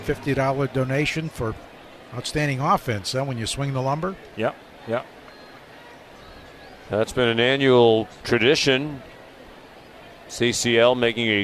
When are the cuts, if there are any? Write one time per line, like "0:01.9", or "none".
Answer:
none